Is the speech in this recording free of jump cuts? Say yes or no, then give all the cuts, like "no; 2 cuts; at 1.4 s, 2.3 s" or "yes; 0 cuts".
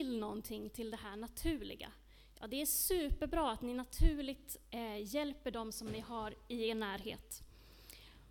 yes; 0 cuts